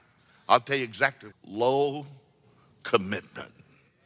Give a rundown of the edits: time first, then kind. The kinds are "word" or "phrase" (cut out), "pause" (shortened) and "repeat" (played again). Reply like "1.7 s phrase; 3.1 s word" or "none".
1.3 s word